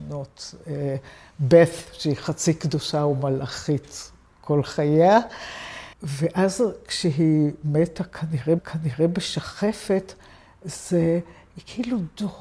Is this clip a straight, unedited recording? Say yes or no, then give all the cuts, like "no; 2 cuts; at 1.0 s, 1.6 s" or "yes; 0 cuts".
no; 2 cuts; at 5.9 s, 8.6 s